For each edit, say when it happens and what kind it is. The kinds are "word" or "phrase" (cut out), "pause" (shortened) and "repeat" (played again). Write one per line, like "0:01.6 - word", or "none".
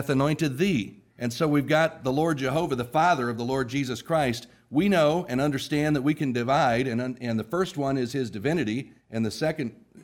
0:01.1 - pause
0:09.0 - pause